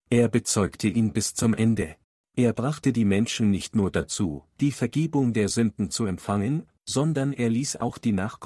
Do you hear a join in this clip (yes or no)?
yes